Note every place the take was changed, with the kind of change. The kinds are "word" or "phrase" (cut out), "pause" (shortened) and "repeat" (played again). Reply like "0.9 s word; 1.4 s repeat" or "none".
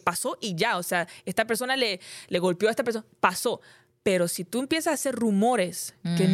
none